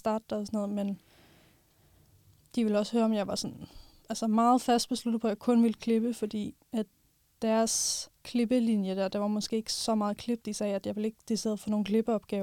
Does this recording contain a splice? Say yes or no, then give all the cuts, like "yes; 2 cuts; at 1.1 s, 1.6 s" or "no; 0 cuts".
yes; 1 cut; at 8.2 s